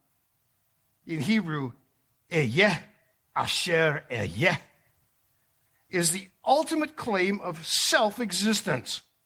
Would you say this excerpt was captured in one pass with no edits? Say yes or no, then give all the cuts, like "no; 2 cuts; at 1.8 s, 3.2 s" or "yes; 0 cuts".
yes; 0 cuts